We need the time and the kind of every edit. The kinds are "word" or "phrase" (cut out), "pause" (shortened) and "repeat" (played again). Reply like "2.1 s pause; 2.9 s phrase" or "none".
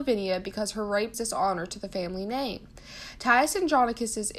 1.1 s word